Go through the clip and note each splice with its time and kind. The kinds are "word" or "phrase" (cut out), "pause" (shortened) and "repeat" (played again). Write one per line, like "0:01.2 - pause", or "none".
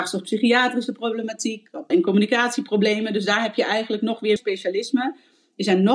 0:01.9 - word
0:04.4 - word